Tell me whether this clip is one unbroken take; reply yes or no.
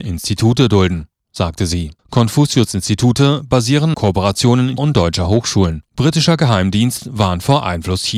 no